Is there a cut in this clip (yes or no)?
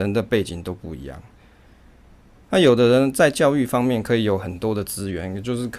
no